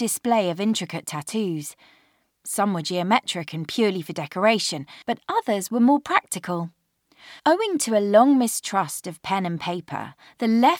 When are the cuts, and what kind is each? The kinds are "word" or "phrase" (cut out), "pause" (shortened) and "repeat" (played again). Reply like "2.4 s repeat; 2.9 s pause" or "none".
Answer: 5.0 s pause; 7.4 s pause